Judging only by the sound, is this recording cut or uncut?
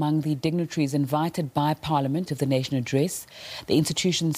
cut